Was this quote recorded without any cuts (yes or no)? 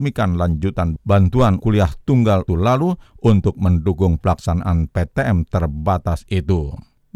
no